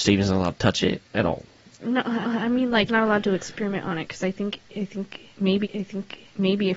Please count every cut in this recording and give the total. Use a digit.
4